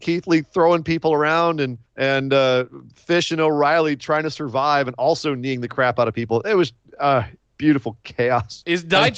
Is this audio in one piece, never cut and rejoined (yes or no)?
no